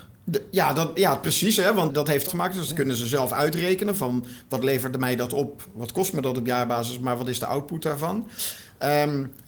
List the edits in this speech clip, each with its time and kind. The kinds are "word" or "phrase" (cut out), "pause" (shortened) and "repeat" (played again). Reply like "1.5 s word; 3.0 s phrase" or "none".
1.9 s word; 2.3 s phrase